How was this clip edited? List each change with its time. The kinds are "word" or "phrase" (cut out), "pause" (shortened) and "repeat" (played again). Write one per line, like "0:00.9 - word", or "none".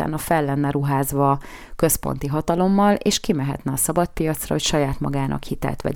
none